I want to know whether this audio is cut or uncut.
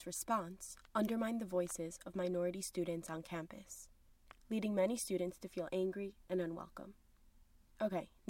uncut